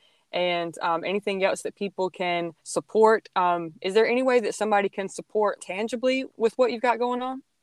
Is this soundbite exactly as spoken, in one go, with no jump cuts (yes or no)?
no